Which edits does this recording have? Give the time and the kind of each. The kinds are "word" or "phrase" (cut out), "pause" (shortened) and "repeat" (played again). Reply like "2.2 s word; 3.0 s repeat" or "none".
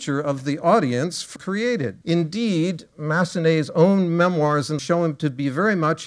1.4 s phrase; 2.0 s pause; 4.8 s word